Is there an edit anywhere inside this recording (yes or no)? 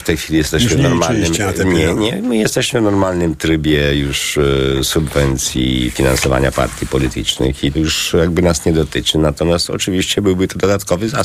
yes